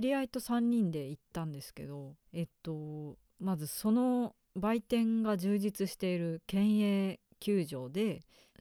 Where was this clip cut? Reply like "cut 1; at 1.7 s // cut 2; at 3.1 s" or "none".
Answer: cut 1; at 2.2 s // cut 2; at 4.4 s